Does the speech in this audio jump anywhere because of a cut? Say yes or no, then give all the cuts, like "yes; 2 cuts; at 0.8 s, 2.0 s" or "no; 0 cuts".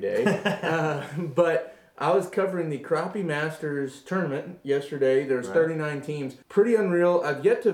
yes; 1 cut; at 6.4 s